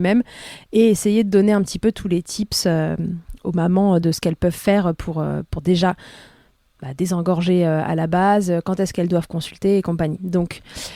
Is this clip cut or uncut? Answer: uncut